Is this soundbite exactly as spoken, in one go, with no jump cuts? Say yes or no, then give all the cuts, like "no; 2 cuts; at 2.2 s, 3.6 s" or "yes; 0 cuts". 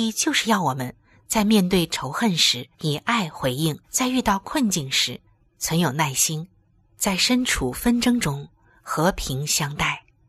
no; 3 cuts; at 2.7 s, 3.8 s, 6.6 s